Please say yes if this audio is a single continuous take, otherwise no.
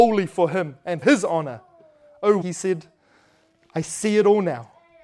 no